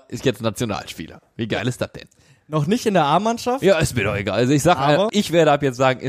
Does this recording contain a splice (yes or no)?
yes